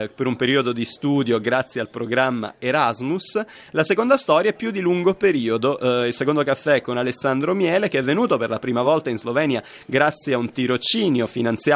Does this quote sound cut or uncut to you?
uncut